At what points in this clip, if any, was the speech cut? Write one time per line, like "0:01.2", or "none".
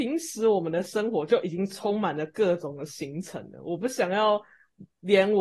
none